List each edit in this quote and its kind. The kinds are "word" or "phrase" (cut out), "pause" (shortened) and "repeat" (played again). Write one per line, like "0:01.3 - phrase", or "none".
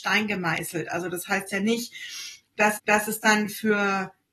0:02.8 - repeat

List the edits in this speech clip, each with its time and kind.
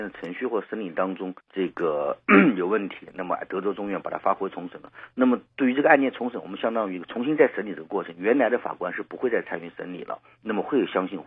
0:01.4 - pause

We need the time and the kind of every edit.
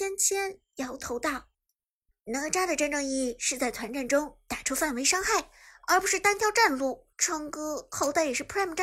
0:01.5 - pause
0:07.1 - pause

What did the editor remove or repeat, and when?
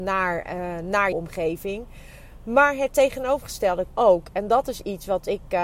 0:01.1 - word
0:03.9 - word

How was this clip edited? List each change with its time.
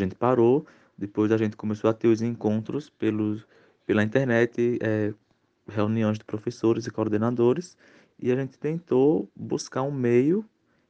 none

